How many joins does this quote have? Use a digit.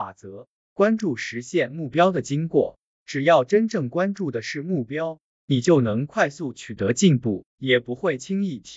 1